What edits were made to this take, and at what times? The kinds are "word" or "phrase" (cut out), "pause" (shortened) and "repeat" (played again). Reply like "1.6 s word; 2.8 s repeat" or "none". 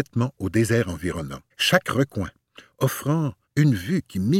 1.5 s pause; 3.4 s pause